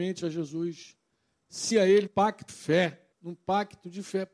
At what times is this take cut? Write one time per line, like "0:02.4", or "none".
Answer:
0:01.7
0:02.1
0:02.5
0:03.1